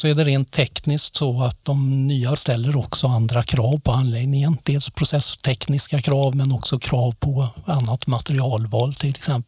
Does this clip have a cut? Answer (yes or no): yes